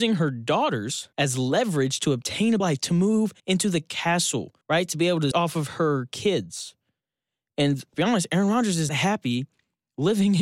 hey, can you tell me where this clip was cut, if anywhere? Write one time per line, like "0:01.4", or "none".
0:01.1
0:02.6
0:03.4
0:04.6
0:05.3
0:07.9
0:08.9